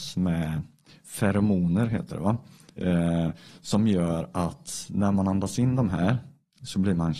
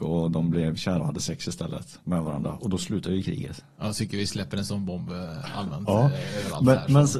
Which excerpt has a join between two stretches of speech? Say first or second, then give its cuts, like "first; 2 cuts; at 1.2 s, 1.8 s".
second; 1 cut; at 1.0 s